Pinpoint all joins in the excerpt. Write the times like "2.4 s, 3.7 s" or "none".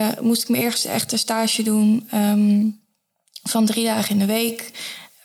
none